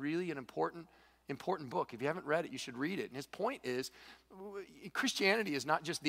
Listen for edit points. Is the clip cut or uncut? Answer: uncut